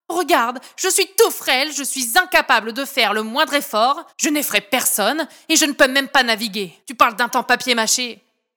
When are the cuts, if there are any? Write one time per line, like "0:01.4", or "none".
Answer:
0:04.1
0:06.8
0:07.3